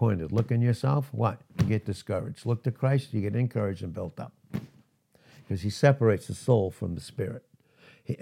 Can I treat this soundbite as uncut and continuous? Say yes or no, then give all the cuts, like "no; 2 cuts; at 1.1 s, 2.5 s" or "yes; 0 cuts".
yes; 0 cuts